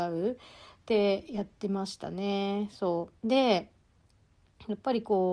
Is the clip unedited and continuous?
no; 1 cut; at 3.2 s

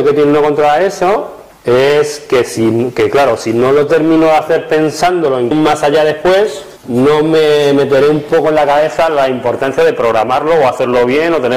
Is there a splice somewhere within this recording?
yes; 3 cuts; at 1.5 s, 5.5 s, 6.8 s

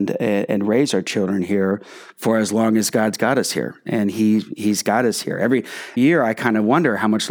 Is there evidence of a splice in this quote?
yes; 1 cut; at 6.0 s

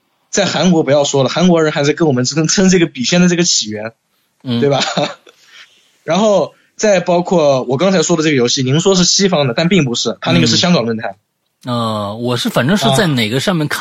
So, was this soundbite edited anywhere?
no; 0 cuts

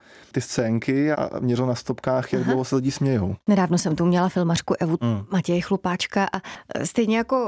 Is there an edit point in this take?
yes; 2 cuts; at 1.1 s, 5.0 s

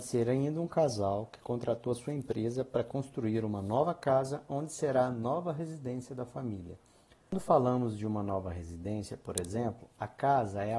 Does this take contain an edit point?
no; 0 cuts

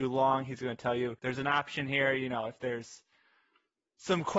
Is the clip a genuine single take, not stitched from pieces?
no; 1 cut; at 1.2 s

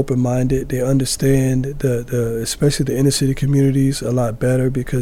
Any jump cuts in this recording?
no; 0 cuts

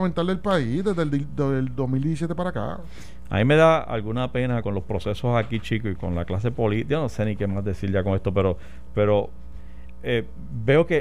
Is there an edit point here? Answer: yes; 2 cuts; at 4.6 s, 6.0 s

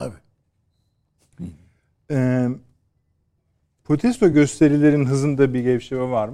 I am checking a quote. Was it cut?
no; 0 cuts

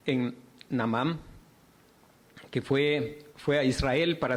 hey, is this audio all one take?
no; 1 cut; at 3.3 s

